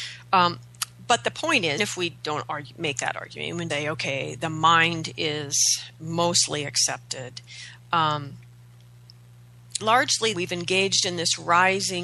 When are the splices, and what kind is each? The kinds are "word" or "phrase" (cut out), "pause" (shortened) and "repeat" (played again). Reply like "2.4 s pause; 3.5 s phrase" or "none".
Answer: 1.8 s word; 3.7 s word; 9.8 s word; 10.3 s word